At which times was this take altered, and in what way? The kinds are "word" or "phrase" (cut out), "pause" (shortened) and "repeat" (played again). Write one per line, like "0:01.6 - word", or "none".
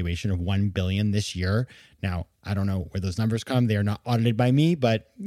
none